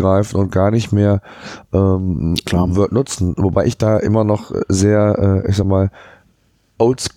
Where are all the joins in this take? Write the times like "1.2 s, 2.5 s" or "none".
none

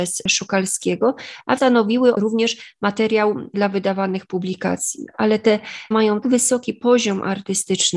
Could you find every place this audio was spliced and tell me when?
1.6 s, 2.1 s, 3.5 s, 5.9 s, 6.2 s

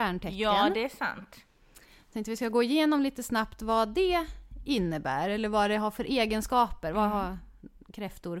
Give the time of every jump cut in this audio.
none

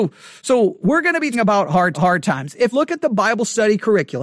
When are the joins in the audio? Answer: 1.3 s, 1.9 s, 2.7 s

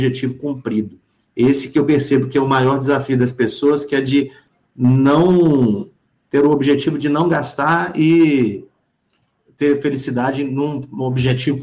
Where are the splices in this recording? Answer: none

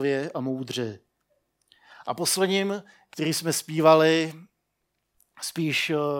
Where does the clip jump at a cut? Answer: none

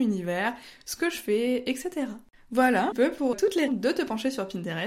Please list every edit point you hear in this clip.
2.9 s, 3.3 s, 3.7 s

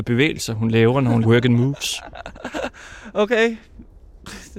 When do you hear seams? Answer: 1.2 s

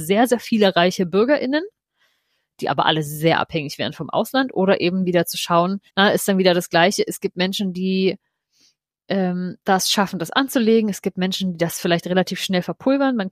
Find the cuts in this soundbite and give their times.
5.9 s

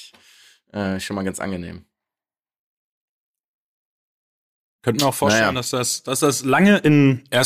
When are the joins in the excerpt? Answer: none

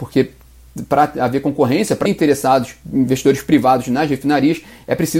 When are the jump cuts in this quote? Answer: 2.1 s, 2.8 s

